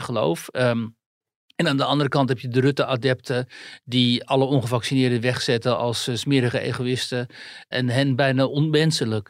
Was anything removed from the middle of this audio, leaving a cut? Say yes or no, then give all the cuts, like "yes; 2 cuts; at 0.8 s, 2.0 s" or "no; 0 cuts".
no; 0 cuts